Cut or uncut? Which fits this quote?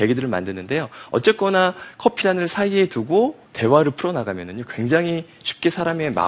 cut